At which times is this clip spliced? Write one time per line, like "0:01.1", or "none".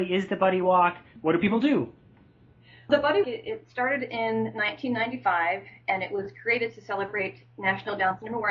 0:01.2
0:02.9
0:03.2